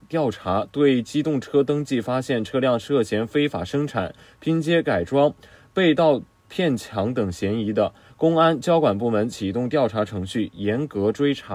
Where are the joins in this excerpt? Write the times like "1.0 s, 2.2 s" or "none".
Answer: none